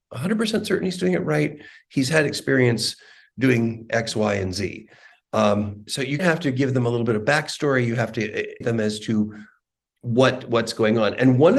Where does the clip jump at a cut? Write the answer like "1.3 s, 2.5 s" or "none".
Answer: 5.9 s, 6.2 s, 8.6 s

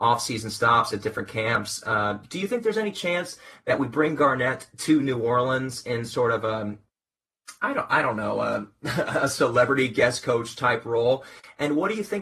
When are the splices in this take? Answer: none

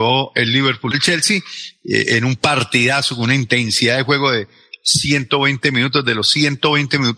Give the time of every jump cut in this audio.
0.9 s

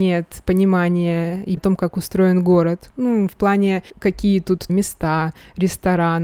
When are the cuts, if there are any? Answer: 1.6 s, 3.9 s, 4.7 s

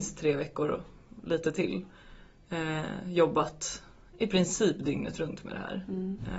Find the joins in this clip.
none

